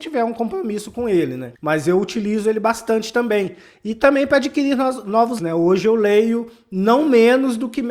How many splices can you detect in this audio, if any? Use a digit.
2